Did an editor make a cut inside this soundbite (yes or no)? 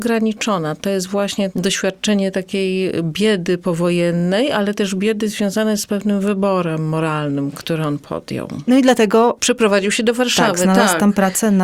no